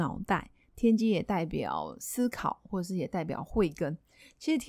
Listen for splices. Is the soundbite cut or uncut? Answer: uncut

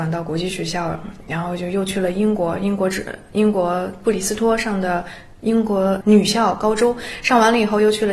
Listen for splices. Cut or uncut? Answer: cut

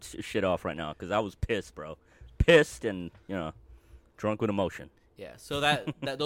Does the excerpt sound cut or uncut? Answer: uncut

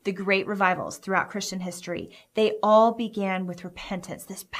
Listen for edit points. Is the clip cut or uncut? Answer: uncut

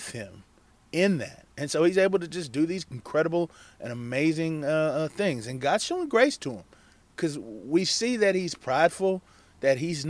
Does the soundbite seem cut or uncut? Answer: uncut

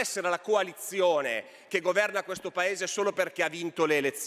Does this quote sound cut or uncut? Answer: uncut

